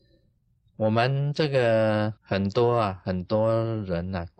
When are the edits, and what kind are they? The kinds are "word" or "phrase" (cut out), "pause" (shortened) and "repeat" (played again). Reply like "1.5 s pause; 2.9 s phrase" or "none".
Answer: 2.2 s pause